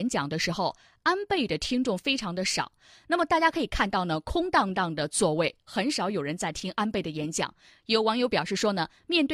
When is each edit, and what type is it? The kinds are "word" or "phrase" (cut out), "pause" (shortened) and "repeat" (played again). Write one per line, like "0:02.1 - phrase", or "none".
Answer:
none